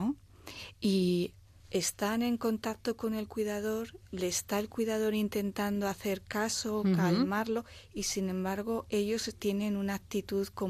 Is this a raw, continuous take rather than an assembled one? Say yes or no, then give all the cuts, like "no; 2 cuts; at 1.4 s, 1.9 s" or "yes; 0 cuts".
no; 1 cut; at 1.6 s